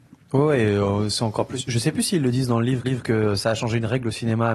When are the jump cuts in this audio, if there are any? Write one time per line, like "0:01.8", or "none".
0:02.8